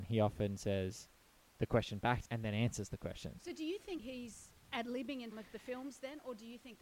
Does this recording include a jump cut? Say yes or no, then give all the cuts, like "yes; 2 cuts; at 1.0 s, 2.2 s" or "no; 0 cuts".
yes; 3 cuts; at 2.2 s, 4.0 s, 5.3 s